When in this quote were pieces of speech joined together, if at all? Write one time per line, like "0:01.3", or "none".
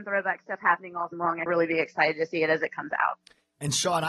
0:01.1
0:01.5